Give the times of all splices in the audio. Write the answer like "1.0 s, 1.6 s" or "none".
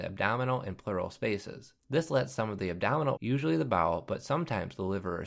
1.8 s, 3.2 s